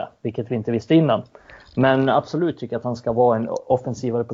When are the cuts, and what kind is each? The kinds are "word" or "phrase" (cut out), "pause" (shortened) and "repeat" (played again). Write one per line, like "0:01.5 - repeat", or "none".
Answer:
none